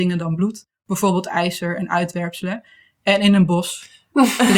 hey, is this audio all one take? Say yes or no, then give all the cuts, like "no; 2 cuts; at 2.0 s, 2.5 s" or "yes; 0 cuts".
yes; 0 cuts